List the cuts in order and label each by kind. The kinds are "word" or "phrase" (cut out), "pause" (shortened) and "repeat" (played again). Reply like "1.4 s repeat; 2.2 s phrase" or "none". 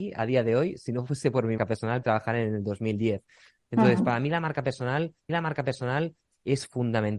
1.6 s word; 2.0 s phrase; 5.3 s repeat